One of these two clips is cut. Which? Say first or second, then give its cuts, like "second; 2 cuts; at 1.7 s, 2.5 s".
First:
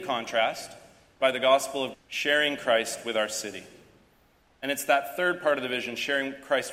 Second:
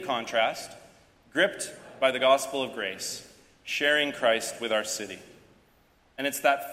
first; 2 cuts; at 1.2 s, 1.9 s